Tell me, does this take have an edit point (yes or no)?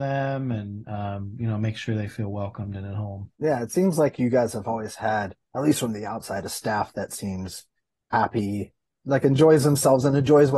yes